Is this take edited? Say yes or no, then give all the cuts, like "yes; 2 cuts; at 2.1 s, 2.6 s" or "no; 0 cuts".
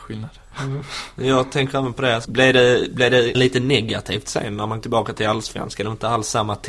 yes; 3 cuts; at 2.2 s, 3.3 s, 4.8 s